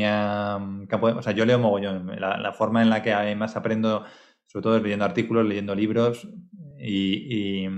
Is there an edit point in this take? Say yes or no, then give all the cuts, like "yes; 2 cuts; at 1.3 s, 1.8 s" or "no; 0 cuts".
no; 0 cuts